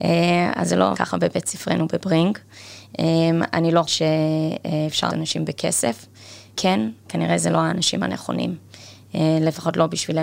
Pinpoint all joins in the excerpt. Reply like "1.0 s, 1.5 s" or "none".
0.9 s, 3.8 s, 5.1 s, 6.6 s, 7.0 s